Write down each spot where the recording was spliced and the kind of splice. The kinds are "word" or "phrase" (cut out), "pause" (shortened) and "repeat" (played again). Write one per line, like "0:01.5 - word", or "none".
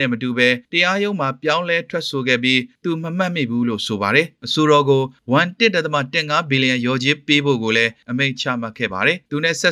none